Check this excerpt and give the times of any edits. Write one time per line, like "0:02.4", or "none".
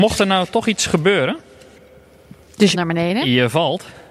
0:02.7